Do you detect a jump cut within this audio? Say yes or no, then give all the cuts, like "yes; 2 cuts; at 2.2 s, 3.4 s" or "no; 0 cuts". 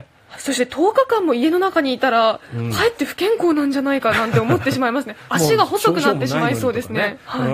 no; 0 cuts